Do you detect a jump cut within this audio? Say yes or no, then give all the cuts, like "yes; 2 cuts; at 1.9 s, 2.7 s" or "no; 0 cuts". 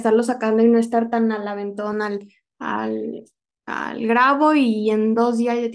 no; 0 cuts